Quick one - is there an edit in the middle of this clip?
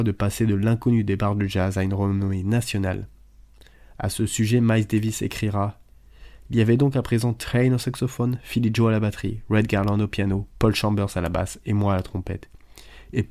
no; 0 cuts

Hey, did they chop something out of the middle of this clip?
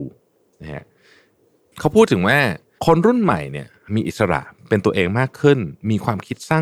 no; 0 cuts

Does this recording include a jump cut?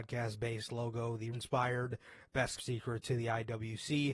yes; 2 cuts; at 1.3 s, 2.6 s

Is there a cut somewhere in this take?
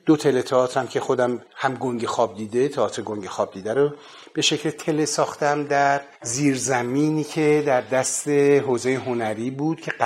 yes; 2 cuts; at 1.5 s, 6.1 s

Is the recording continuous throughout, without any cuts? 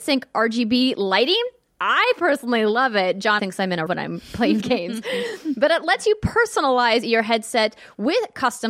no; 3 cuts; at 3.4 s, 3.9 s, 4.6 s

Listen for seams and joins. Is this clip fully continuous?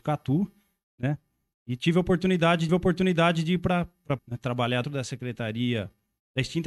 no; 3 cuts; at 2.7 s, 4.2 s, 4.8 s

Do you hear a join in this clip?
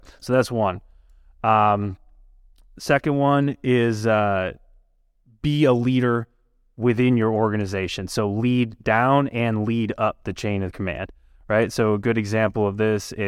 no; 0 cuts

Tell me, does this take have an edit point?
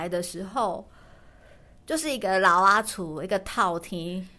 no; 0 cuts

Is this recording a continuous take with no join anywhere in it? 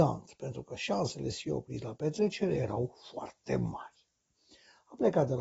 yes; 0 cuts

